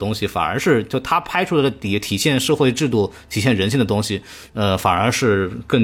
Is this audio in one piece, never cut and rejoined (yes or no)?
yes